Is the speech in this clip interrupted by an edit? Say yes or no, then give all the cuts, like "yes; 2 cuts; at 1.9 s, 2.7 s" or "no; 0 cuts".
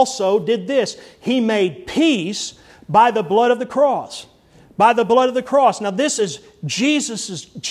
no; 0 cuts